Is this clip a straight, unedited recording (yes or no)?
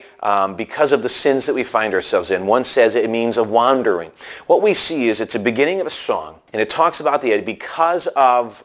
no